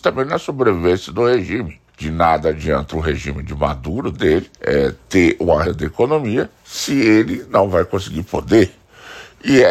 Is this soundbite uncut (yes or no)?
no